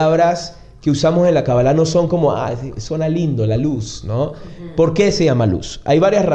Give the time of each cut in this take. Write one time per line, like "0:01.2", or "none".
none